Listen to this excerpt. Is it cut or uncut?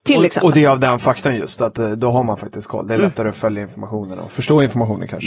uncut